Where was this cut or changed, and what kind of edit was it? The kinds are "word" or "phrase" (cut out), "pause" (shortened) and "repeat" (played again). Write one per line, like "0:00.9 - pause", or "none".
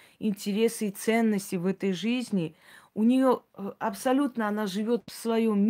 none

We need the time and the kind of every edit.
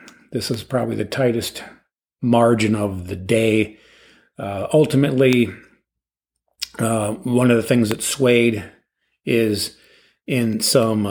none

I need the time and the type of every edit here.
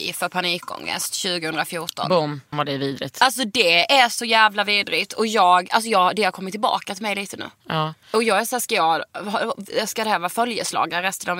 0:02.5 - phrase
0:08.0 - pause

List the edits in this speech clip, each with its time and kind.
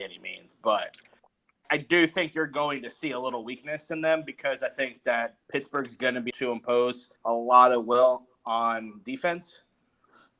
0:01.6 - word
0:05.4 - pause
0:06.3 - word
0:07.2 - pause

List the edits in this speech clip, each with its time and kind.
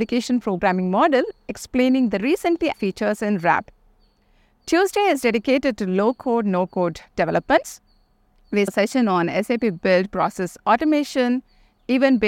0:02.7 - word
0:08.7 - word

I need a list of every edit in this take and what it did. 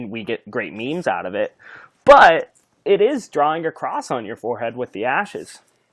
none

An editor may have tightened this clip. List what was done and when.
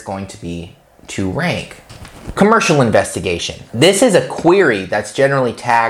none

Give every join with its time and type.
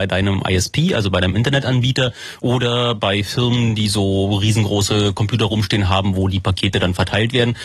none

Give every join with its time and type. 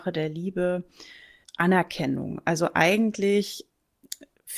0:01.4 - word

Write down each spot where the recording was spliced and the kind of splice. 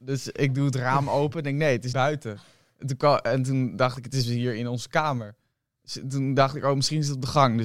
0:01.9 - word

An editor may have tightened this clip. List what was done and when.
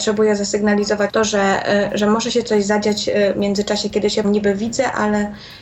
0:01.1 - word
0:04.2 - word

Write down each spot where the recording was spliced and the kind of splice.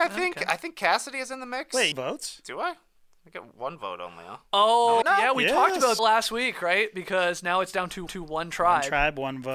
0:01.9 - phrase
0:05.0 - phrase
0:06.0 - word
0:08.1 - repeat

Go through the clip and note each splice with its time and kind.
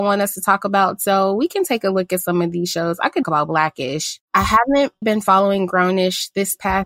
0:03.2 - phrase
0:05.0 - word

